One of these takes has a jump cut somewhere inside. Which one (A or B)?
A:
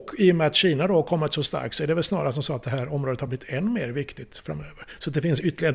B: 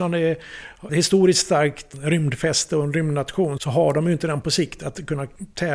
B